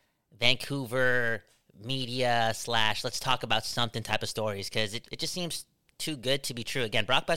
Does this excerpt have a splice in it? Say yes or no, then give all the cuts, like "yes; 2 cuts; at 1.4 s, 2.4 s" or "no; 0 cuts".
yes; 1 cut; at 5.0 s